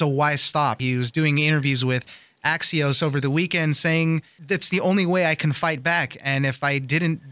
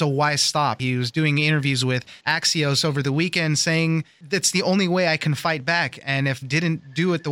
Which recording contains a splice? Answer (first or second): second